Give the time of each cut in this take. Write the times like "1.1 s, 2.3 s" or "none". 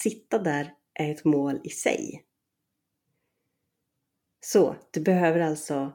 none